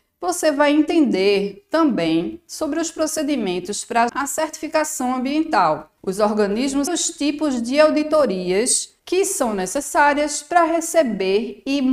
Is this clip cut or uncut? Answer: cut